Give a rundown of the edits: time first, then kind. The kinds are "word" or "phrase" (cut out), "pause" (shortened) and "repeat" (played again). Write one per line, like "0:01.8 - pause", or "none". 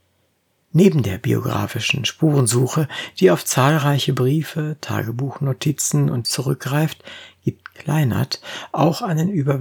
0:06.2 - word